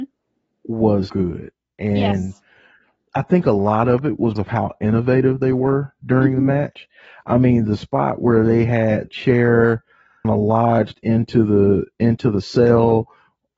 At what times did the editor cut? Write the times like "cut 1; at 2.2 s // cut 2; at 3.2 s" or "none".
cut 1; at 1.1 s // cut 2; at 4.4 s // cut 3; at 9.1 s // cut 4; at 10.2 s